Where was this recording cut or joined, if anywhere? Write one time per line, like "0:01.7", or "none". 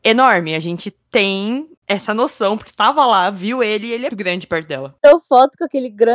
0:01.8
0:02.7
0:04.1